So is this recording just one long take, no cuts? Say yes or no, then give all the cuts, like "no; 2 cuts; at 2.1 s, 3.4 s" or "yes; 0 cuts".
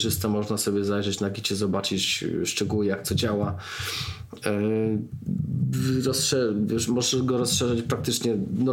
yes; 0 cuts